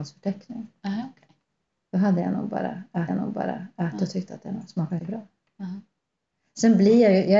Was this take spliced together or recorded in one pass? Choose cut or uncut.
cut